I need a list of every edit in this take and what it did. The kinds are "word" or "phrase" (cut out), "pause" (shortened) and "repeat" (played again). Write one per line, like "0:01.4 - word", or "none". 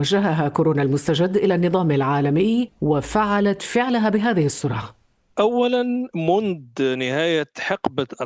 none